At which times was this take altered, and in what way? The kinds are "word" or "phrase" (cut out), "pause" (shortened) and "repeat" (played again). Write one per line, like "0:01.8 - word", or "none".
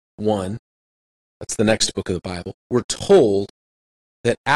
0:02.6 - pause

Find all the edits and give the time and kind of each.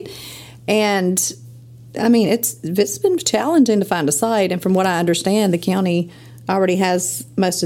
none

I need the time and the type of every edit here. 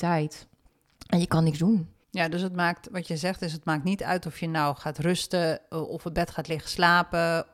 0:02.0 - pause

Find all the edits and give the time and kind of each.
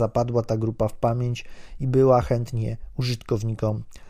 none

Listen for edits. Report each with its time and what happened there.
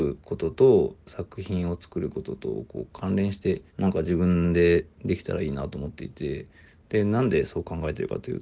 0:03.7 - pause

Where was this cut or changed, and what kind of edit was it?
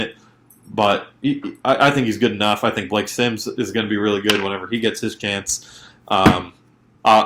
none

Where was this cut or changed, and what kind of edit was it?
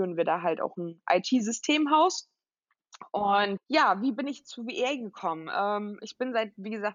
0:03.6 - word

